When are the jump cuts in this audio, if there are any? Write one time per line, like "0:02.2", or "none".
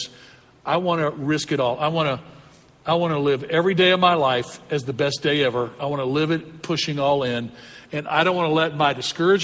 none